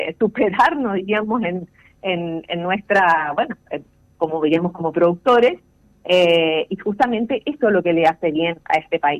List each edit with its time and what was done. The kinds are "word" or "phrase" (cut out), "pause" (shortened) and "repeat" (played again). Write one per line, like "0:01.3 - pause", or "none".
none